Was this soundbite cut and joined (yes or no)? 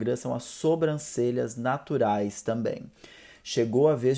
no